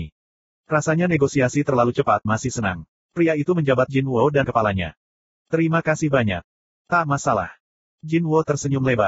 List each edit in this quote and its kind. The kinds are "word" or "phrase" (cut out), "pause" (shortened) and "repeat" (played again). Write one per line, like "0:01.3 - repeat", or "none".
0:02.3 - phrase
0:03.9 - word
0:04.4 - word